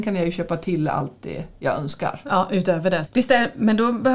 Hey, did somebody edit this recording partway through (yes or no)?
yes